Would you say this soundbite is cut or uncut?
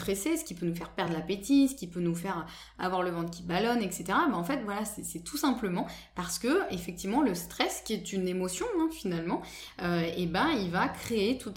uncut